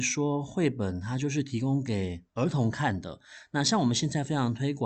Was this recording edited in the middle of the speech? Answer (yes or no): yes